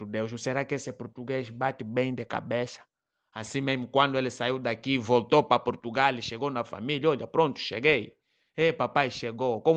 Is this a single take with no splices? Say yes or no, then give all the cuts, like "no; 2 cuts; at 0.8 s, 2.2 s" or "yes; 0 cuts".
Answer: yes; 0 cuts